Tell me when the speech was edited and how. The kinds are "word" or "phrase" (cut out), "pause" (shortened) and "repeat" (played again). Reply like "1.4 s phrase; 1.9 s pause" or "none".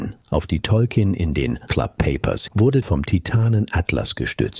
1.7 s word; 2.5 s word; 2.8 s phrase

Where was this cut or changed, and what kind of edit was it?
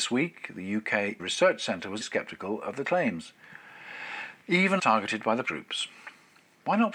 1.2 s word; 2.0 s word; 2.8 s word; 4.8 s phrase; 5.4 s word

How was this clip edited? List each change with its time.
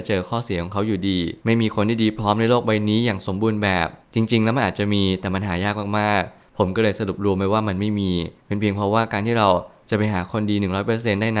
1.4 s pause; 4.0 s pause; 8.4 s pause

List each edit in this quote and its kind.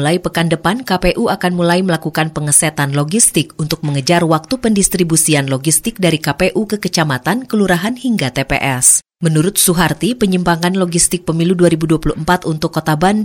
none

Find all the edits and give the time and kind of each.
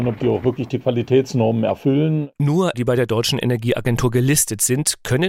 2.7 s word

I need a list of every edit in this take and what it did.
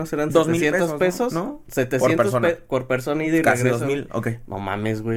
none

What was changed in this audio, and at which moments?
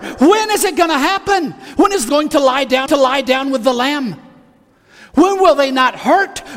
2.1 s word; 2.9 s repeat

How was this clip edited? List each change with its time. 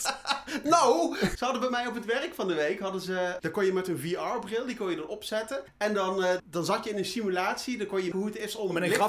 1.3 s word; 3.4 s word; 5.7 s pause; 6.4 s word; 8.1 s word

